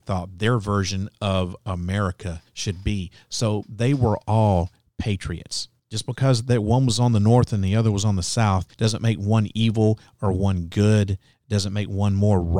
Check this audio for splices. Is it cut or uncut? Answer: cut